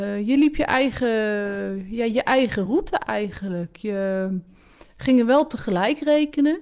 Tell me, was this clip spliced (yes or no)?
no